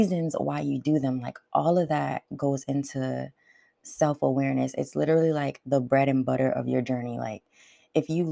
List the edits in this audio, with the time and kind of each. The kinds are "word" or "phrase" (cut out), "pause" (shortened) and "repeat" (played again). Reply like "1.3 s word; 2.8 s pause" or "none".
none